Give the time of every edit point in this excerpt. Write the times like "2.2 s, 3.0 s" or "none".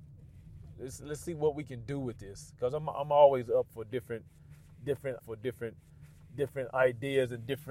5.2 s